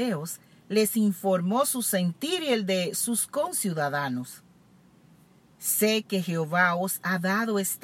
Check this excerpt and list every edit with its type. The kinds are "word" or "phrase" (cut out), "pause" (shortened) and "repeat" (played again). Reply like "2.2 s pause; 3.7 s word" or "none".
none